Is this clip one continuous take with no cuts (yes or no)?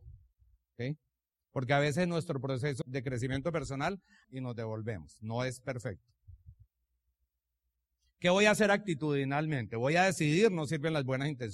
no